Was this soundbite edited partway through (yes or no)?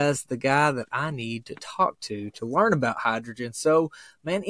no